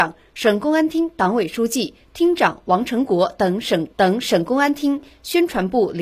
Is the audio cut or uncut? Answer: cut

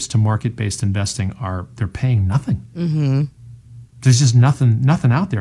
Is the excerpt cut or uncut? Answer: uncut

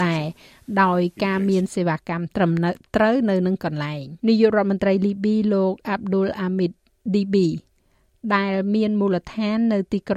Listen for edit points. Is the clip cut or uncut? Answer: cut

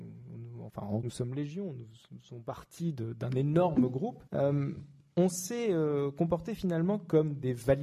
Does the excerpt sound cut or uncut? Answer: cut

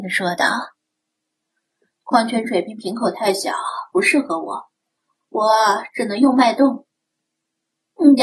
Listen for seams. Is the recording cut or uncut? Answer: uncut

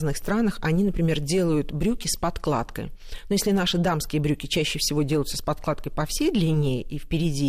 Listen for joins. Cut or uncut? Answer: uncut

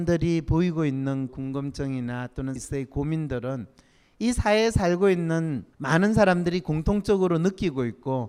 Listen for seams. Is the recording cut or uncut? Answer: cut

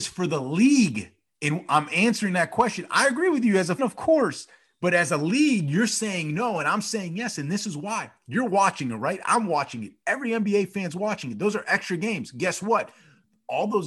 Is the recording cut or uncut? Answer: cut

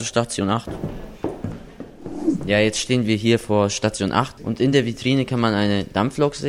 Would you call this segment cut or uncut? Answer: uncut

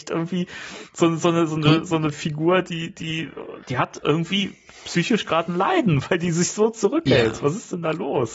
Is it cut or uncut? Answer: cut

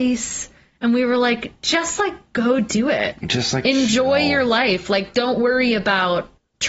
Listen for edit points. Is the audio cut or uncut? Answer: uncut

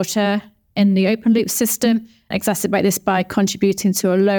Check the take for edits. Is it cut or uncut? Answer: cut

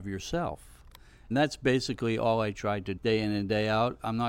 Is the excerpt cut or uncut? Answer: cut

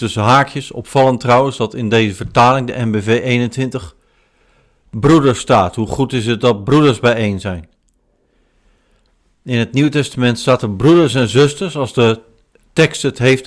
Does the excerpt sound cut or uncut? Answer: uncut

